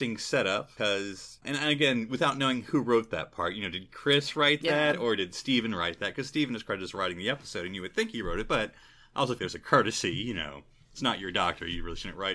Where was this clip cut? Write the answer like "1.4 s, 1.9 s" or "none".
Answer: 1.4 s, 9.4 s